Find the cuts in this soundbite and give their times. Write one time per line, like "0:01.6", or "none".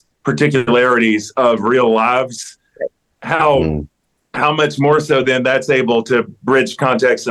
none